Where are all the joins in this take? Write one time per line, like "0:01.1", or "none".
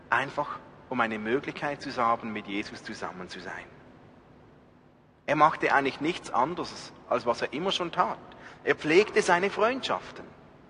none